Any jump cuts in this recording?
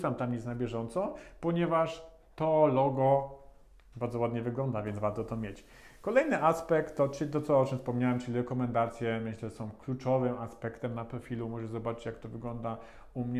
no; 0 cuts

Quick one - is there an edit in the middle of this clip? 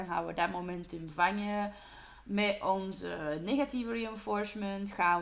no; 0 cuts

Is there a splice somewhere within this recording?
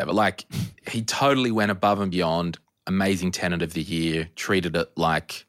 no; 0 cuts

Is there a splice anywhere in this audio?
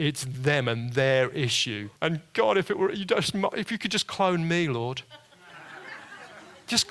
yes; 1 cut; at 2.0 s

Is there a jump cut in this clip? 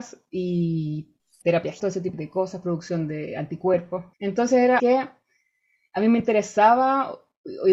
yes; 5 cuts; at 1.4 s, 1.8 s, 2.1 s, 4.1 s, 4.8 s

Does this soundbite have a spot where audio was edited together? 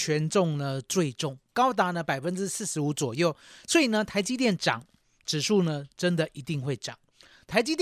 yes; 1 cut; at 1.5 s

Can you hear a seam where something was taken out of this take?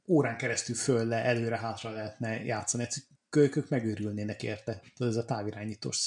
no; 0 cuts

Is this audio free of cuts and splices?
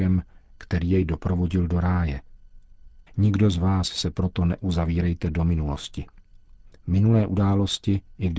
no; 1 cut; at 3.1 s

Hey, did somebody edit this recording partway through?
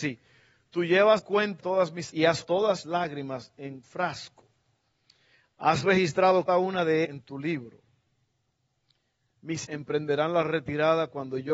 yes; 9 cuts; at 1.2 s, 1.6 s, 2.1 s, 2.4 s, 2.8 s, 3.8 s, 6.5 s, 7.0 s, 9.6 s

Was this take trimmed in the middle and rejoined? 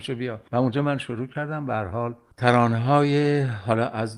no; 0 cuts

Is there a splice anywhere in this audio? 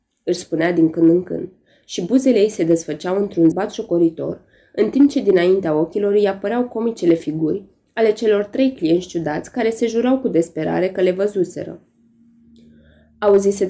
yes; 1 cut; at 3.5 s

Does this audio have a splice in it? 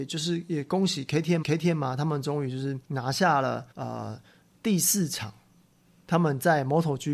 yes; 3 cuts; at 1.4 s, 2.8 s, 3.7 s

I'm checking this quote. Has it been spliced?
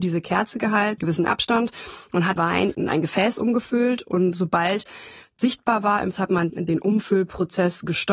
yes; 5 cuts; at 1.0 s, 2.4 s, 5.4 s, 6.1 s, 6.5 s

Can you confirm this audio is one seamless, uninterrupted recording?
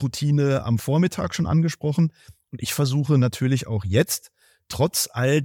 yes; 0 cuts

